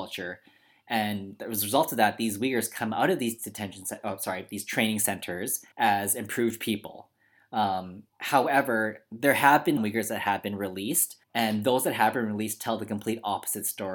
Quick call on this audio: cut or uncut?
cut